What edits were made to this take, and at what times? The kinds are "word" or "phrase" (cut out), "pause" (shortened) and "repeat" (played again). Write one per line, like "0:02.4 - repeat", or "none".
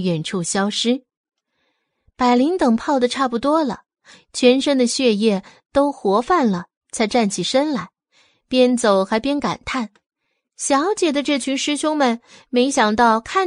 none